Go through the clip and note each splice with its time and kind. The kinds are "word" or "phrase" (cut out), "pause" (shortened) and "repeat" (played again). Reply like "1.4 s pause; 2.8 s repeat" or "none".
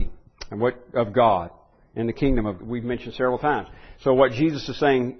2.6 s phrase